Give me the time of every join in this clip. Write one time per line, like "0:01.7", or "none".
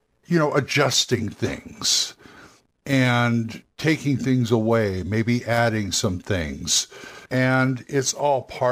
0:03.7
0:07.3